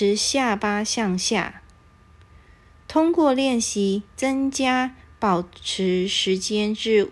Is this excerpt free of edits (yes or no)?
yes